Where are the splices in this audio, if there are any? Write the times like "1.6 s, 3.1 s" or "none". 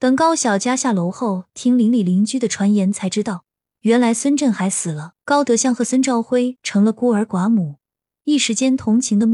5.2 s